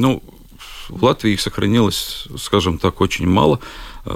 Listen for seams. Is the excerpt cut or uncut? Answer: uncut